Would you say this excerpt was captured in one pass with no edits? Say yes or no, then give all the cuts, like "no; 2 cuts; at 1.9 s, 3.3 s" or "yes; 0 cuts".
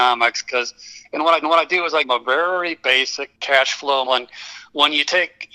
no; 4 cuts; at 1.4 s, 2.0 s, 3.3 s, 4.1 s